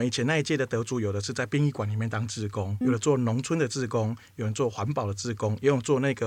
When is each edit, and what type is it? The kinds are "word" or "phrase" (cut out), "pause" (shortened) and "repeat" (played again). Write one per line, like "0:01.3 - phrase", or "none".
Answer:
0:02.8 - word